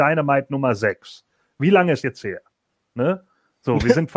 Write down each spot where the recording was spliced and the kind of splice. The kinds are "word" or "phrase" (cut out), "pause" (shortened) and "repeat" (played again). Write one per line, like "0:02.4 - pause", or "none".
0:02.0 - word